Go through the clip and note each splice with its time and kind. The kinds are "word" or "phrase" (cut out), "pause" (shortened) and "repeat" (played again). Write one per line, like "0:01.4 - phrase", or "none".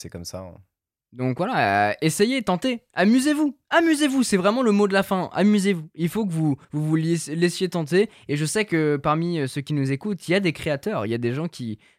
0:06.6 - pause